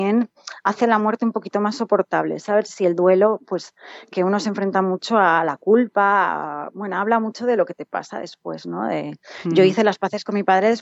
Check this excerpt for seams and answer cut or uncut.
uncut